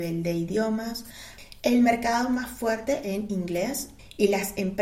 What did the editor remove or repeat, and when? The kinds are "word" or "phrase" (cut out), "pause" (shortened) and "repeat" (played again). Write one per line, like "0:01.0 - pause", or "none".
0:03.0 - phrase